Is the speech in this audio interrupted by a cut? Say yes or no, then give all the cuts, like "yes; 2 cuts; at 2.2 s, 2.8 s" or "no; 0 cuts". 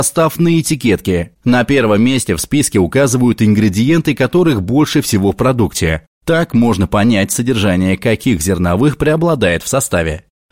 yes; 1 cut; at 1.3 s